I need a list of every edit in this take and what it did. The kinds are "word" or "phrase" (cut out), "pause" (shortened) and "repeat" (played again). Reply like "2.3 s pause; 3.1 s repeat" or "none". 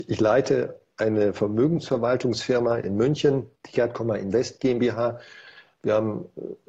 3.6 s pause